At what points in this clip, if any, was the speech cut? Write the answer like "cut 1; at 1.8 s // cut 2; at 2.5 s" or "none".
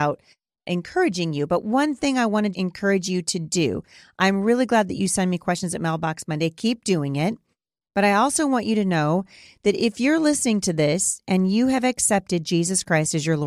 cut 1; at 2.5 s